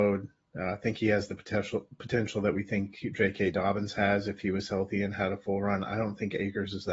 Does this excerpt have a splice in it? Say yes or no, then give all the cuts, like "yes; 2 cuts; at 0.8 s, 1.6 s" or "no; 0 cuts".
no; 0 cuts